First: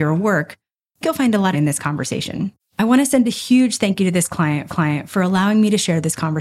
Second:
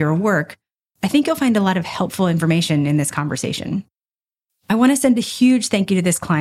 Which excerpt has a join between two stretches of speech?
first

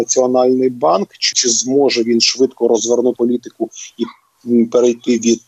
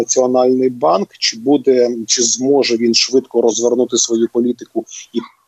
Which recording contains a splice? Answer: first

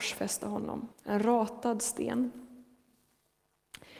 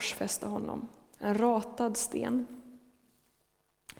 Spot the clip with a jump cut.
first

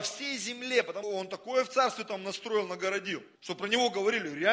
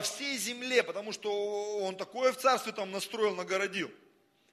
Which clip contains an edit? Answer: first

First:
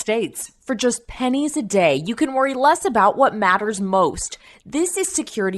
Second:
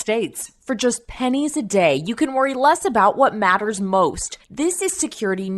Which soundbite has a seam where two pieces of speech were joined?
second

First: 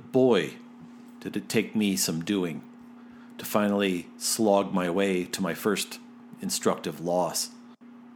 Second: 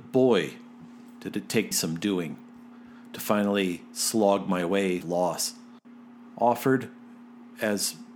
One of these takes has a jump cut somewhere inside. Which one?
second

